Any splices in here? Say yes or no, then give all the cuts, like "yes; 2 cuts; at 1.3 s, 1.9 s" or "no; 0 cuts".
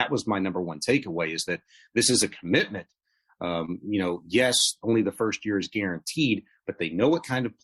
no; 0 cuts